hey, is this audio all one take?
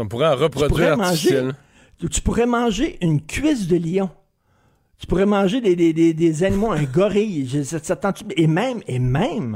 yes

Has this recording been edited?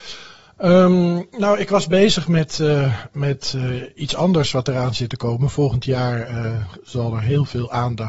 no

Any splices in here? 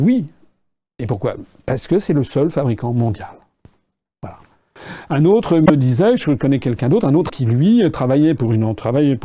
yes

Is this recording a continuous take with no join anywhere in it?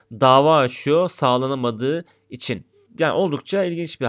yes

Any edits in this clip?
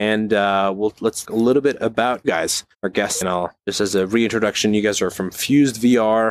yes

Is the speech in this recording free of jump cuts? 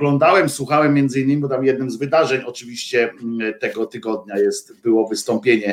yes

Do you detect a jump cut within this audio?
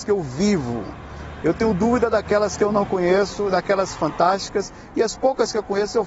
no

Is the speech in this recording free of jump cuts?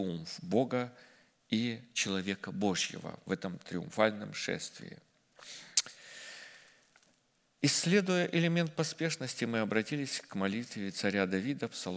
yes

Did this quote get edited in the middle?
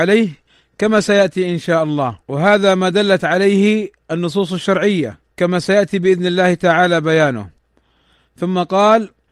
yes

